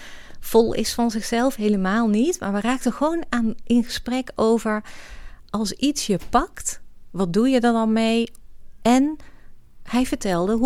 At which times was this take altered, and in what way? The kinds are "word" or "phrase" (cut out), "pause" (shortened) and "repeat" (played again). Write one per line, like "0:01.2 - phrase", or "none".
none